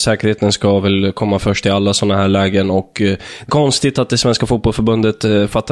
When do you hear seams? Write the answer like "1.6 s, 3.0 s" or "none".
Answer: 3.5 s